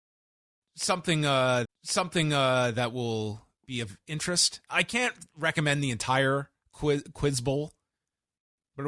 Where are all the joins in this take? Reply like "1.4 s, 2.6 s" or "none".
1.6 s, 4.7 s